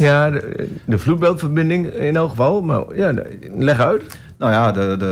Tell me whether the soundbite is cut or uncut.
uncut